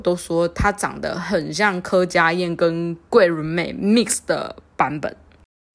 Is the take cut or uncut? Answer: uncut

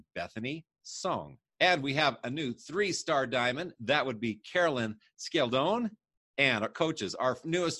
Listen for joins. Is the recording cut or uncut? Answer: cut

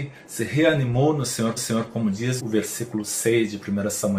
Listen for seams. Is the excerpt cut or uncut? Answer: cut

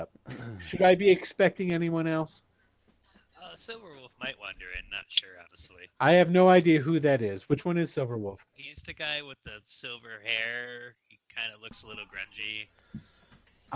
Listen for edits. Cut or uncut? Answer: uncut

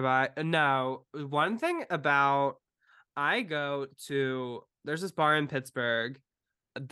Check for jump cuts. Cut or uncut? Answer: cut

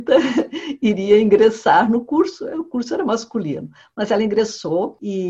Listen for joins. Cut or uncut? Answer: uncut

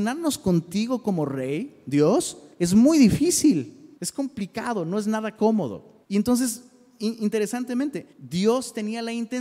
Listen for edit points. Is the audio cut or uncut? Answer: cut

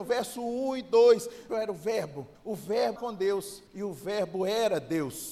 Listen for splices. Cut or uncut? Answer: cut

